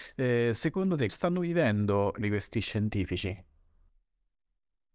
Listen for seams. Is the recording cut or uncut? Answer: cut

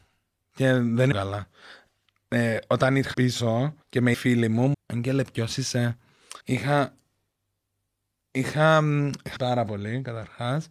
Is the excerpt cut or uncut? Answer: cut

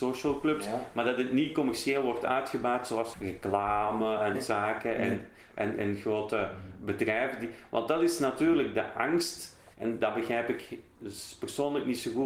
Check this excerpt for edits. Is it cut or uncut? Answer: cut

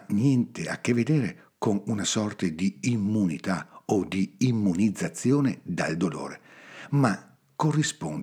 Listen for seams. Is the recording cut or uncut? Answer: uncut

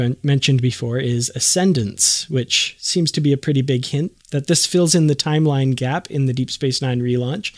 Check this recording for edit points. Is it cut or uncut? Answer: uncut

